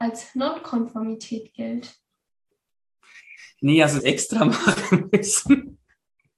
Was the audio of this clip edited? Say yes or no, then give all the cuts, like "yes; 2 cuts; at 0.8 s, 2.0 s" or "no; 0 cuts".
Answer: yes; 1 cut; at 4.0 s